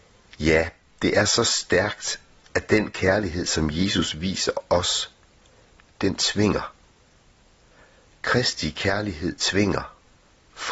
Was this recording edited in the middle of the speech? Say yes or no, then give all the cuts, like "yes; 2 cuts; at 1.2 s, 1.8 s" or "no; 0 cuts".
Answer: no; 0 cuts